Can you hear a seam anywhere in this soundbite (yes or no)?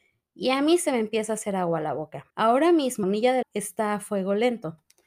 yes